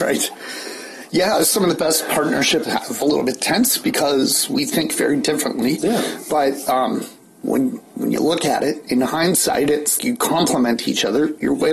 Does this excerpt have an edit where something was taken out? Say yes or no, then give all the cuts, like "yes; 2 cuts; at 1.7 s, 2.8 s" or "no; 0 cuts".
yes; 3 cuts; at 2.6 s, 3.0 s, 10.0 s